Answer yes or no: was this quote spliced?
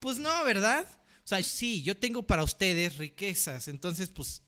yes